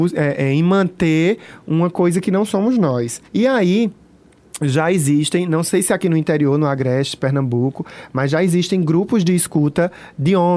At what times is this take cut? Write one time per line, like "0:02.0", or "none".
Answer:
0:03.3